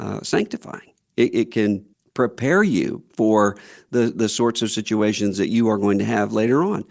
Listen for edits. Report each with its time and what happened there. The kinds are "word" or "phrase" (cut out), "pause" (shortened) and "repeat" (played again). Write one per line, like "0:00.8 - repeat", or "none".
0:01.9 - pause
0:03.1 - pause